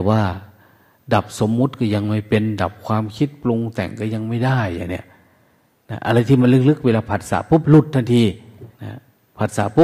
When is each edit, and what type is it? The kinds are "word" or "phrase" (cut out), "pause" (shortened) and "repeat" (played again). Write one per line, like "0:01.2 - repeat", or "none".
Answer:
0:08.7 - pause